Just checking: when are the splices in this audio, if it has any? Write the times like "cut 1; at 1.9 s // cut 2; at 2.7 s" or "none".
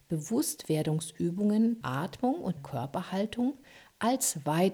cut 1; at 1.8 s // cut 2; at 2.6 s